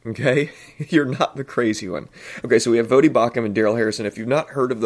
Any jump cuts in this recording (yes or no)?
no